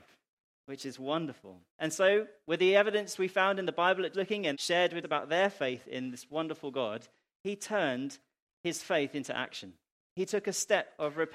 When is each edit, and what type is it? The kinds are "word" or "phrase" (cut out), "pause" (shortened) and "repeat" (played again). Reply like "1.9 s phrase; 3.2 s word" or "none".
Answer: 1.7 s pause; 4.1 s word; 4.5 s phrase; 5.0 s word